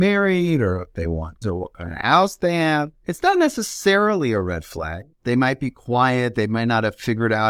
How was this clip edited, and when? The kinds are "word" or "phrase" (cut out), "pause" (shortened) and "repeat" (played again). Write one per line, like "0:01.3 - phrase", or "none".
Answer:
0:01.4 - word
0:03.0 - pause
0:05.1 - pause